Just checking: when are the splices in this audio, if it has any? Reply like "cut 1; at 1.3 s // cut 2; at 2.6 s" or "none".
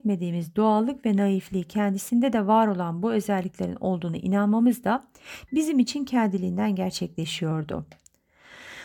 none